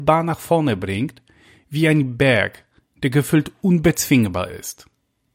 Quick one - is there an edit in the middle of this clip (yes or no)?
no